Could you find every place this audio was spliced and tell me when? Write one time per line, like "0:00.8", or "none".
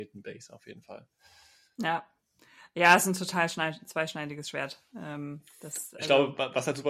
none